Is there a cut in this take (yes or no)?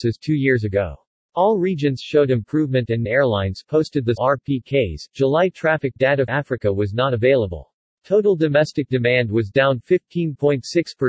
yes